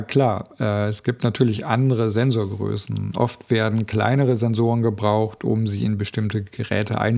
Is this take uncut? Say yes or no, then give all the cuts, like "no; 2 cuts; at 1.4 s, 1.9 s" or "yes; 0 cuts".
yes; 0 cuts